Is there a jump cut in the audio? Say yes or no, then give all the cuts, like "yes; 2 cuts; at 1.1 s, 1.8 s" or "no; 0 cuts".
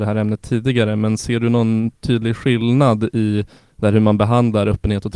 no; 0 cuts